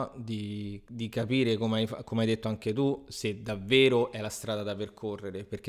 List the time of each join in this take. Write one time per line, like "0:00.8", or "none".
none